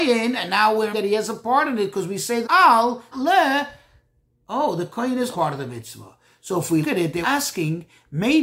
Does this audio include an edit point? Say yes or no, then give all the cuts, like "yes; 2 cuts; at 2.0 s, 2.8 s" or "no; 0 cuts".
yes; 6 cuts; at 0.9 s, 2.4 s, 3.1 s, 5.3 s, 6.8 s, 7.2 s